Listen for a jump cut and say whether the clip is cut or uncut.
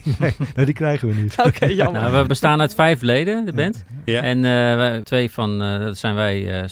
cut